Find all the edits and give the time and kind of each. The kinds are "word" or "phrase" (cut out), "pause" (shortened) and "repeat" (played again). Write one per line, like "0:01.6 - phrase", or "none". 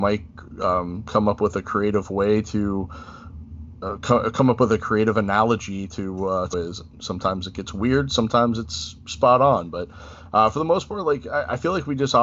0:06.5 - phrase